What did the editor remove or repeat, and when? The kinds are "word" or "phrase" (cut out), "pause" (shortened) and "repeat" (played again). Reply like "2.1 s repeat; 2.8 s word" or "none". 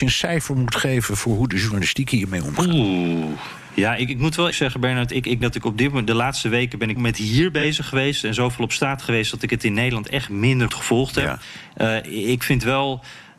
4.5 s word; 5.4 s word; 7.0 s word; 10.7 s word